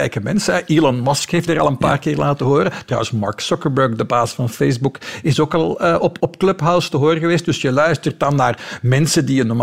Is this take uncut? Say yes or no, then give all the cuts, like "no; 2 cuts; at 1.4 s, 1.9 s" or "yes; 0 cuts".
no; 2 cuts; at 1.5 s, 6.2 s